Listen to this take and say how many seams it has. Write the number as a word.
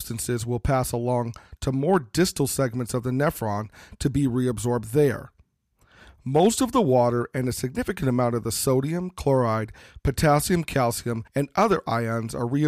one